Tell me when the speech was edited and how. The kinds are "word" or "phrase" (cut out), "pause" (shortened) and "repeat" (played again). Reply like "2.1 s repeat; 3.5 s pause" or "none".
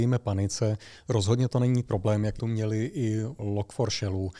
1.8 s word; 2.4 s word; 3.4 s word